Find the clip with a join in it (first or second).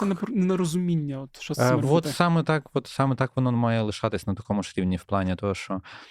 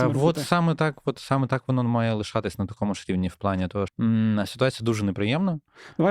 second